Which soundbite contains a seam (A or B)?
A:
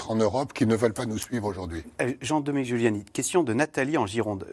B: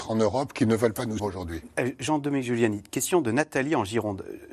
B